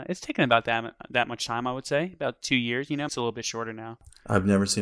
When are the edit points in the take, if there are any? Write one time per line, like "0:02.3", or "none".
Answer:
0:03.1

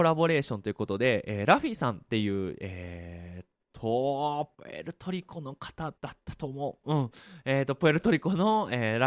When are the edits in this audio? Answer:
0:04.6
0:06.0

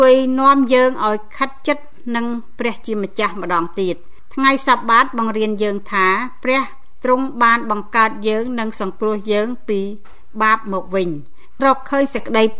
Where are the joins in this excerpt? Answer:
0:11.6

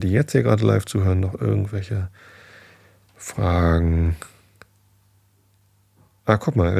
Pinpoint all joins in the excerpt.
none

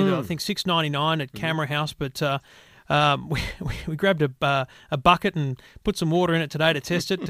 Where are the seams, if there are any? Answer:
none

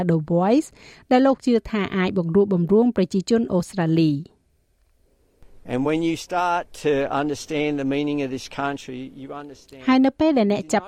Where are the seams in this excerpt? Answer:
none

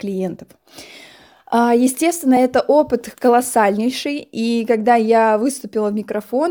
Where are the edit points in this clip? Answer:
none

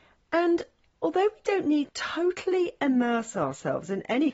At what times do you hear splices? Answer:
0:01.9

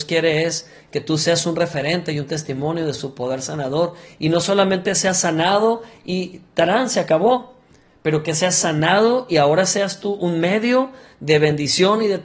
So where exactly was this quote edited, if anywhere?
none

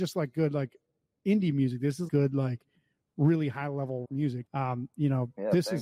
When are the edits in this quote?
0:02.1
0:04.0
0:04.5

